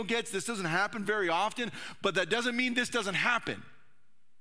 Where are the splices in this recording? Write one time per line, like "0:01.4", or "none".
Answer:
none